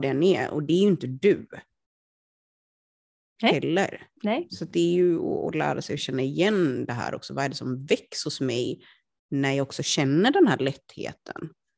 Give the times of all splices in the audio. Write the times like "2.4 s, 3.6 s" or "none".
none